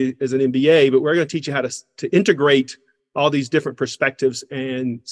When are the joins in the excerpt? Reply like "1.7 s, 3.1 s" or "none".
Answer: none